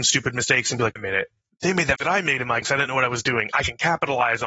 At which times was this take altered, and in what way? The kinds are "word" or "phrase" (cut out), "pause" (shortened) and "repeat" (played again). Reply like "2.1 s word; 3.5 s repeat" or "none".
1.0 s word; 2.0 s word; 2.6 s word